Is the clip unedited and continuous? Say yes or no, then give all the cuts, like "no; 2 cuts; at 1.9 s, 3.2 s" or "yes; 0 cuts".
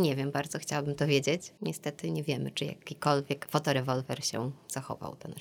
yes; 0 cuts